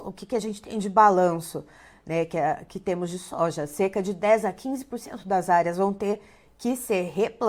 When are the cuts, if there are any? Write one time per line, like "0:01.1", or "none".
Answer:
none